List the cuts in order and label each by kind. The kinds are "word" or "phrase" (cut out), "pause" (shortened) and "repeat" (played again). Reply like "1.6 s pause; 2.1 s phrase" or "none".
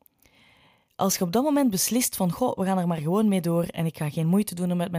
none

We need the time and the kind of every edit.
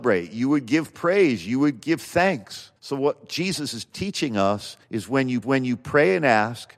2.8 s pause; 4.8 s pause; 5.4 s repeat

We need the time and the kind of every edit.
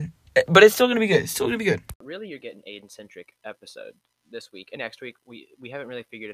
2.4 s word; 4.2 s word; 4.8 s word

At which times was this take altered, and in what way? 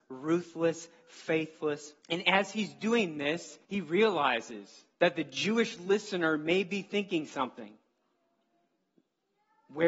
2.0 s pause; 3.6 s pause; 4.9 s pause

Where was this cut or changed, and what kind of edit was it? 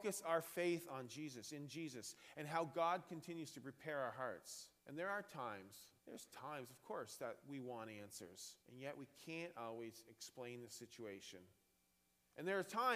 4.8 s pause; 6.0 s pause; 8.6 s pause

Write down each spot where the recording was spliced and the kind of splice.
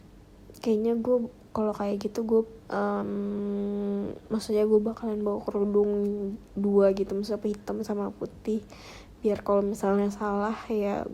2.6 s phrase

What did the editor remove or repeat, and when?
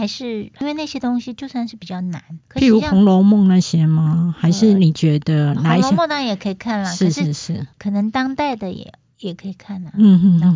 2.4 s pause; 7.7 s pause

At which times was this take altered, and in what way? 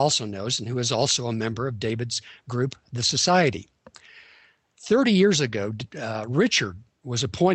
none

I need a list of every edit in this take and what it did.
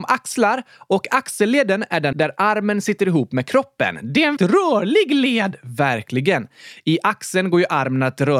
2.1 s word; 4.4 s word

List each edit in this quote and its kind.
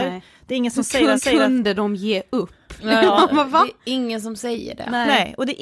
1.2 s repeat

